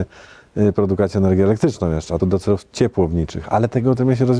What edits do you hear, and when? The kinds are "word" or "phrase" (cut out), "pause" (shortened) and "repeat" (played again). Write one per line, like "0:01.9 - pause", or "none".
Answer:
0:02.2 - phrase

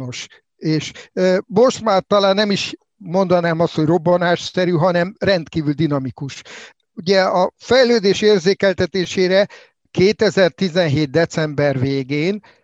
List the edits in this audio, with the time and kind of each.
0:01.1 - word

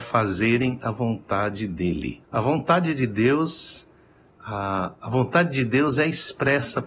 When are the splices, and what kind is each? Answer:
0:02.2 - pause

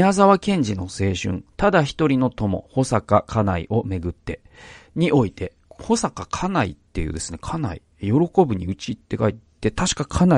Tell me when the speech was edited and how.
none

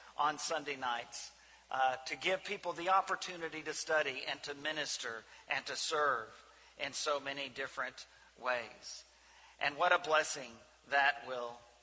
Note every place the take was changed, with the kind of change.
none

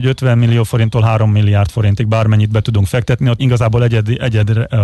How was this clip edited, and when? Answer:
0:03.4 - word

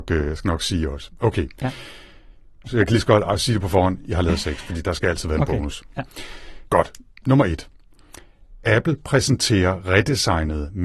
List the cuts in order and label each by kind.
none

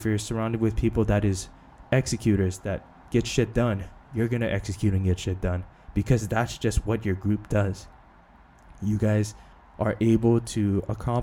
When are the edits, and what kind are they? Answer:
0:09.5 - pause

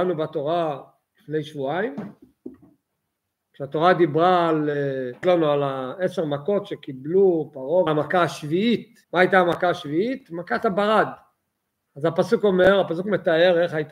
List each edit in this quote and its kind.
0:05.2 - word
0:07.9 - phrase
0:09.0 - pause

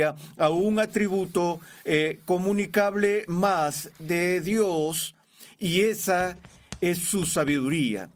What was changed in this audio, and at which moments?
none

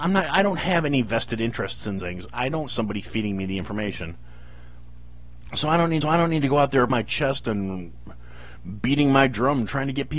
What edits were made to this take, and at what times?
0:02.0 - word
0:02.7 - word
0:06.0 - repeat
0:06.9 - word

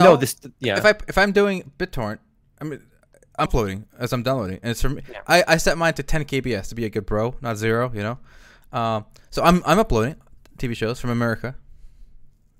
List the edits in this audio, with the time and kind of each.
0:03.5 - word

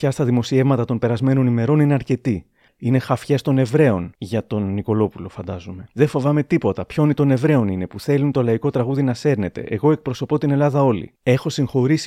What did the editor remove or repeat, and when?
none

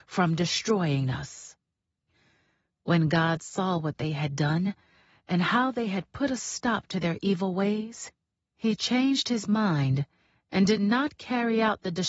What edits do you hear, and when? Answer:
none

